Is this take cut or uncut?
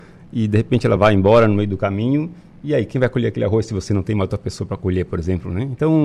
uncut